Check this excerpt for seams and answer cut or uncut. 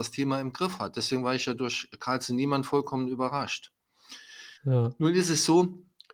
cut